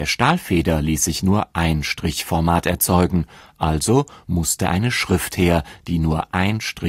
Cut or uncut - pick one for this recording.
uncut